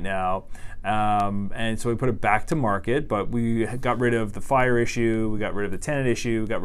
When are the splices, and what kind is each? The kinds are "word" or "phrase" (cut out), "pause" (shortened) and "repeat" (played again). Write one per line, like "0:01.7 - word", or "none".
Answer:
none